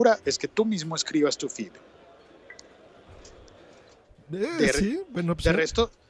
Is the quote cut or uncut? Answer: uncut